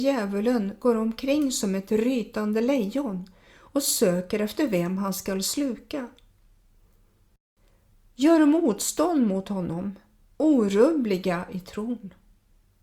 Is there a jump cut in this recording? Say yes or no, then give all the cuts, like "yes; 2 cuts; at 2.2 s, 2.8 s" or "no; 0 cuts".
no; 0 cuts